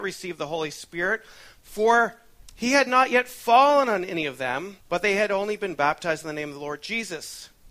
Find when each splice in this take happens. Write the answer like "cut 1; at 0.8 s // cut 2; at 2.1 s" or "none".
cut 1; at 4.8 s